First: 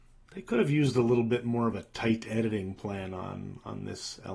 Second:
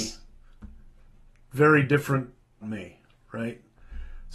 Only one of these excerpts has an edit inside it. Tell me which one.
second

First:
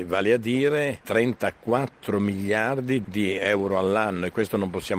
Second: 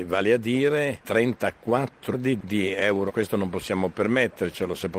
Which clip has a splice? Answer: second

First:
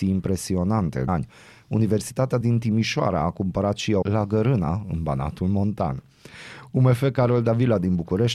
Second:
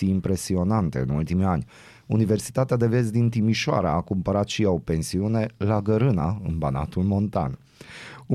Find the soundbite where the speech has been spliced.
first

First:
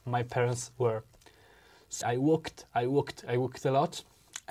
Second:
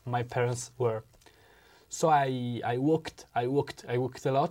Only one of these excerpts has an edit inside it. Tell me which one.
first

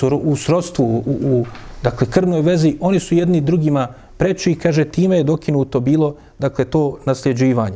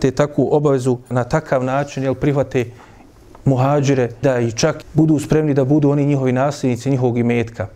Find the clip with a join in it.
second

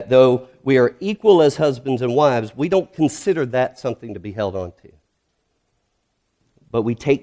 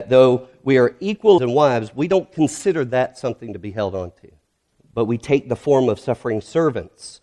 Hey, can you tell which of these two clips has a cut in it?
second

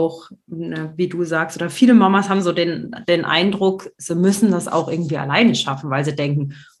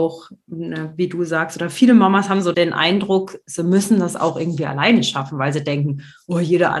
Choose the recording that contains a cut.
second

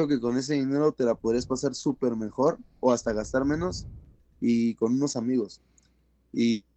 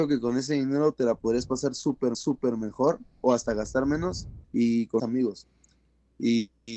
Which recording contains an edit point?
second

